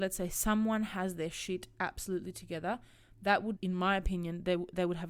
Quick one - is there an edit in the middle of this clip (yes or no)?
yes